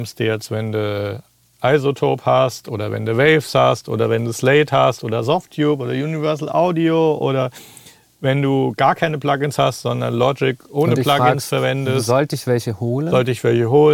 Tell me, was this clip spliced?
no; 0 cuts

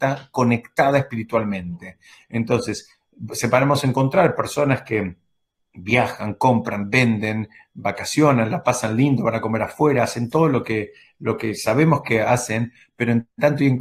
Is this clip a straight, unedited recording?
yes; 0 cuts

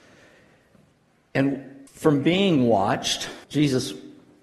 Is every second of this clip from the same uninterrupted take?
no; 2 cuts; at 1.9 s, 3.4 s

